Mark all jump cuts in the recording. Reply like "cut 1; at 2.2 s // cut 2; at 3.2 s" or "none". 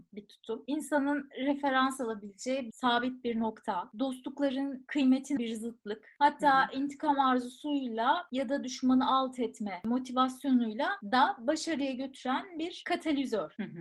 cut 1; at 2.7 s // cut 2; at 5.4 s

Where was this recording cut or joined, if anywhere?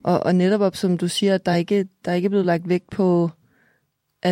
none

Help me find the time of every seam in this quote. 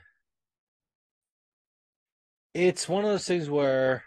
none

